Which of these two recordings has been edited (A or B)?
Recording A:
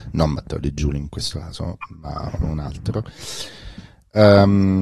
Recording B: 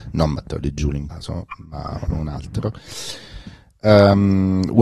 B